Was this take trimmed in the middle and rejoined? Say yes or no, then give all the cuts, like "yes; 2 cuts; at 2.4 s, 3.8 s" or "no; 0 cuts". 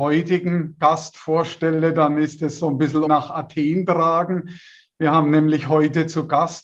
yes; 1 cut; at 3.1 s